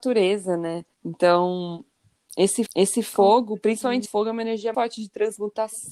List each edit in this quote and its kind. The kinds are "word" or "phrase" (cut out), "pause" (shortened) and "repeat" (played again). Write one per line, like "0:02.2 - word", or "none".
0:00.9 - pause
0:02.7 - repeat
0:04.1 - phrase
0:04.7 - word

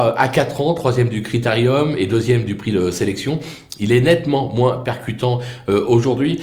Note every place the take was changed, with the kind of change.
none

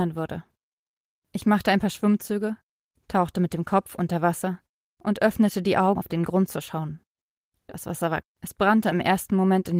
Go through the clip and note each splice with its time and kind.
0:06.0 - word
0:08.2 - word

